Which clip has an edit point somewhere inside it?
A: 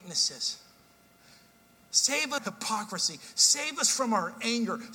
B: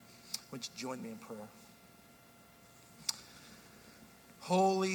A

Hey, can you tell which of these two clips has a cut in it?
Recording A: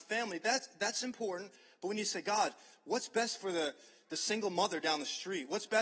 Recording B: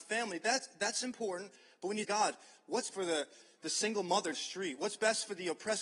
B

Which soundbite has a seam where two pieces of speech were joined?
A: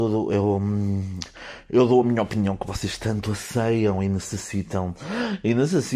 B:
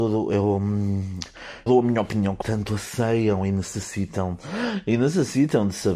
B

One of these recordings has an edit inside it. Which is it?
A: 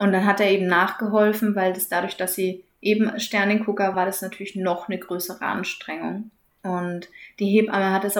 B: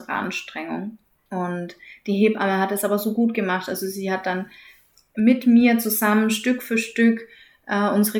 A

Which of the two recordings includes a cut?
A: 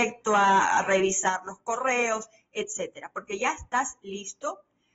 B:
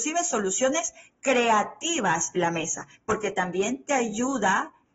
B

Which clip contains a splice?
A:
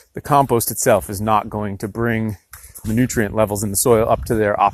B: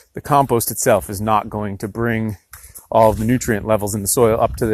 A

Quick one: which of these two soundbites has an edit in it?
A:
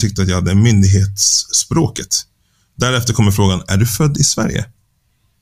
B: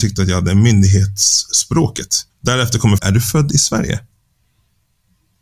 B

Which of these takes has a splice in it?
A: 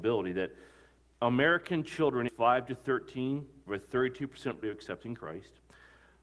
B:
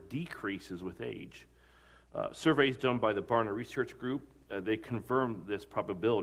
A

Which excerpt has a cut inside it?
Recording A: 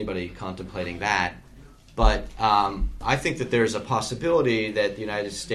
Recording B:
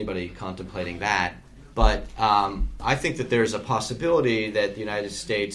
B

